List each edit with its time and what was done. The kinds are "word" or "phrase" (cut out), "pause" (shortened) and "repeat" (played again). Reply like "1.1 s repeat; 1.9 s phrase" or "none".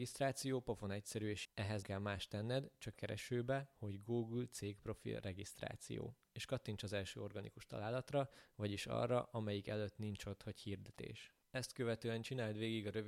1.4 s word; 1.8 s word; 2.9 s phrase; 11.4 s pause